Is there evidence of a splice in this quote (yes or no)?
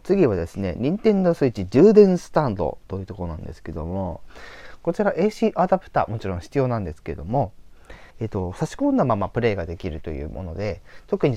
yes